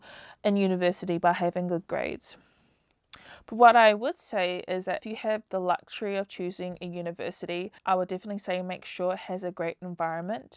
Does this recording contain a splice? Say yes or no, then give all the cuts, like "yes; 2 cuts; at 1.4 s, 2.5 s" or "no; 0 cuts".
yes; 2 cuts; at 5.0 s, 7.8 s